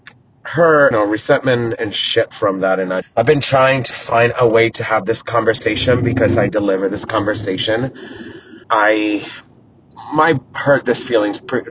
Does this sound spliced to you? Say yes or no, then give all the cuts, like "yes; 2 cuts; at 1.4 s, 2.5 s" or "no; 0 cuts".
yes; 5 cuts; at 0.9 s, 3.0 s, 3.9 s, 6.5 s, 8.6 s